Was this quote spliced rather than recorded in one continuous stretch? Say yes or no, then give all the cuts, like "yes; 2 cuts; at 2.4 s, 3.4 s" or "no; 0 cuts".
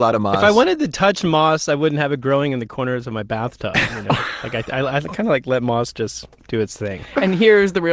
no; 0 cuts